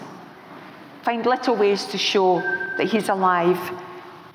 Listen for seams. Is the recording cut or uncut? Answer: uncut